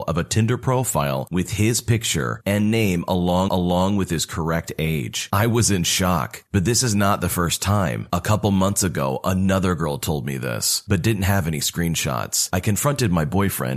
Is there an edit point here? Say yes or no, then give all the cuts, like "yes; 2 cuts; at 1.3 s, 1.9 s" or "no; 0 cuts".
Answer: yes; 1 cut; at 3.5 s